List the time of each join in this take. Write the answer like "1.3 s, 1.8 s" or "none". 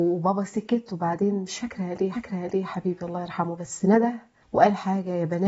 2.1 s, 4.4 s